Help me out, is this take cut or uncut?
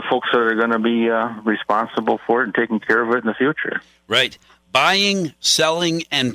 uncut